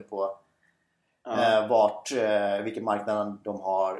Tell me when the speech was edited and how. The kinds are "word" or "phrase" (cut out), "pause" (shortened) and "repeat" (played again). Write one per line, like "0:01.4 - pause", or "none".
none